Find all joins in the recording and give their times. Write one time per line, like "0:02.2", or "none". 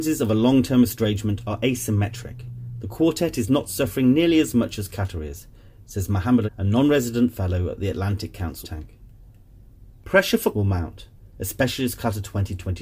0:06.5
0:08.6
0:10.5